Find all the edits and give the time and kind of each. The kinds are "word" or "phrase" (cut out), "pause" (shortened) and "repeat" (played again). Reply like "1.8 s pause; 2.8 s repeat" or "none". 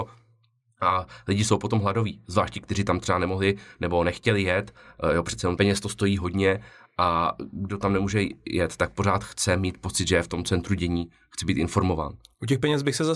none